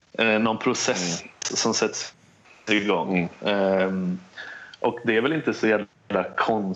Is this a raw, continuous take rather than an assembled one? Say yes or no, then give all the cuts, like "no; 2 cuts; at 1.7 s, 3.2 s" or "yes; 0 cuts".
yes; 0 cuts